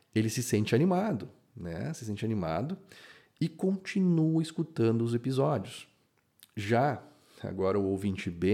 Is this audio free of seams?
yes; 0 cuts

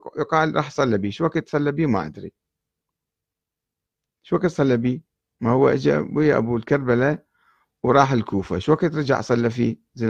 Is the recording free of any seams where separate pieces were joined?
yes; 0 cuts

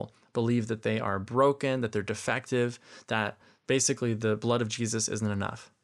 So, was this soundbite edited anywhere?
no; 0 cuts

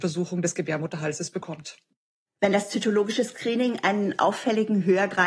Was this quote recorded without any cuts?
yes; 0 cuts

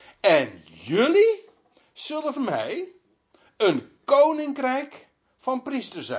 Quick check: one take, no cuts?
no; 1 cut; at 2.4 s

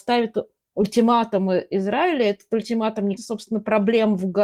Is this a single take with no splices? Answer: no; 1 cut; at 3.2 s

